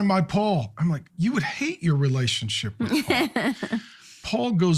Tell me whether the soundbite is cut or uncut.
cut